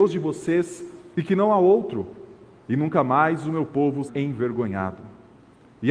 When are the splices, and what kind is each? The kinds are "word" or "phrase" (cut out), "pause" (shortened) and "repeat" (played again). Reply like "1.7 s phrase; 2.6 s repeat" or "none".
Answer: 4.1 s word